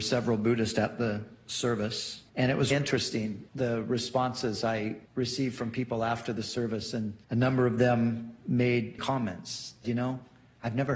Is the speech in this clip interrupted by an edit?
yes; 7 cuts; at 2.3 s, 2.7 s, 3.5 s, 5.1 s, 7.2 s, 9.0 s, 9.8 s

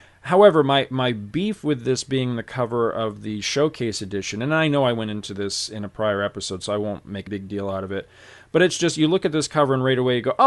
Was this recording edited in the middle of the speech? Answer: yes; 1 cut; at 7.3 s

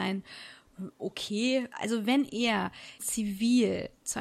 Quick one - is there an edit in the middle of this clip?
yes; 2 cuts; at 1.7 s, 3.0 s

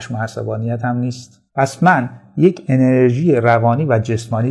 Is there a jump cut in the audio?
yes; 1 cut; at 1.5 s

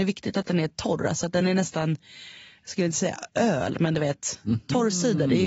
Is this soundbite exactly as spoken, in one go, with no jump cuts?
yes; 0 cuts

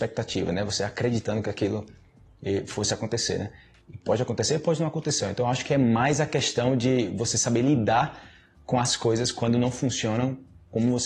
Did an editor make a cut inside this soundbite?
no; 0 cuts

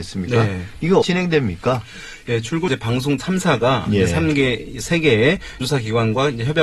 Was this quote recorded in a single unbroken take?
no; 4 cuts; at 1.0 s, 2.7 s, 3.2 s, 5.6 s

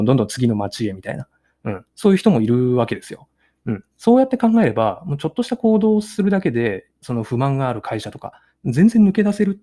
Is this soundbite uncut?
no; 1 cut; at 7.0 s

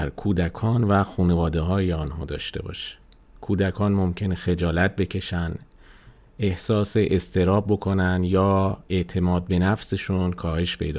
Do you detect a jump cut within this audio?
no; 0 cuts

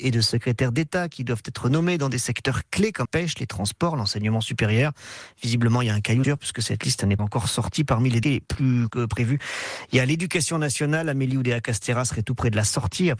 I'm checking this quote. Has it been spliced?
yes; 5 cuts; at 3.0 s, 6.2 s, 7.2 s, 8.2 s, 8.9 s

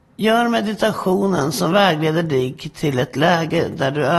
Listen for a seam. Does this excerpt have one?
no; 0 cuts

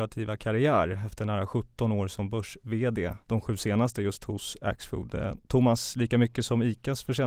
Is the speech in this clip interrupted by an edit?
no; 0 cuts

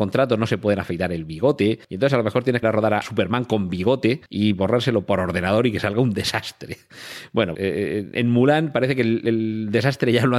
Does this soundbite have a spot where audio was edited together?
yes; 5 cuts; at 1.8 s, 2.6 s, 3.0 s, 4.3 s, 7.5 s

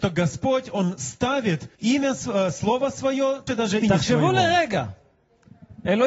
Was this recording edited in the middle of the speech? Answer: yes; 3 cuts; at 1.7 s, 3.5 s, 3.8 s

